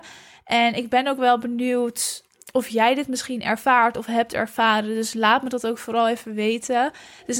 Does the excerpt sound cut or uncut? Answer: uncut